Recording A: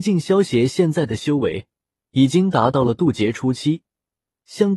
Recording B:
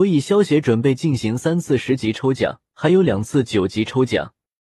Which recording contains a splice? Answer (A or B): B